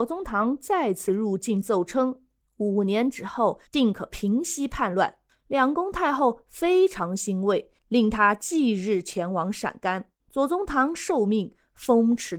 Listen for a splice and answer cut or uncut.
cut